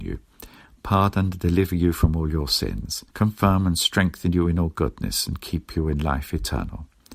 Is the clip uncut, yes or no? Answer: no